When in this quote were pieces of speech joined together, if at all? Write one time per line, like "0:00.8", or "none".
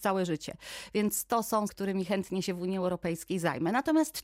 0:01.7